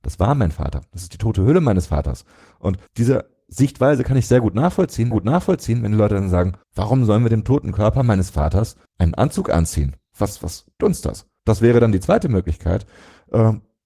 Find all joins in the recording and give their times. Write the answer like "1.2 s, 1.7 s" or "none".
2.9 s, 5.1 s, 6.6 s, 8.9 s, 10.8 s, 11.4 s